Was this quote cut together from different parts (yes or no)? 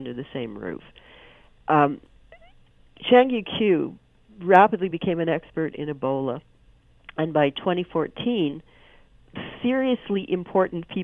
no